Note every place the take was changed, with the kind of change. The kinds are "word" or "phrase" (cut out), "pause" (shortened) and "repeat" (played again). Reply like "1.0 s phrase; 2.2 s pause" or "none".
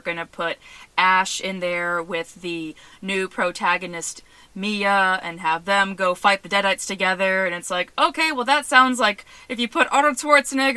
none